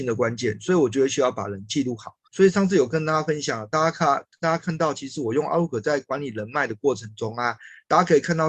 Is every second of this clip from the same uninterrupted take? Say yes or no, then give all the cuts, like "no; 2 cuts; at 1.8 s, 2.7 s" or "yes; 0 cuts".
no; 1 cut; at 2.2 s